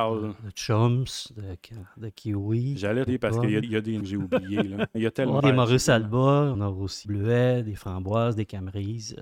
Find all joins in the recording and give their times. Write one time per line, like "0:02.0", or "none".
0:03.1
0:03.6
0:04.0
0:04.9
0:05.4
0:06.5
0:07.0